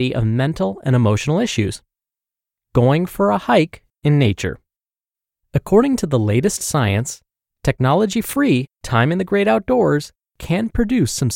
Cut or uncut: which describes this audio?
uncut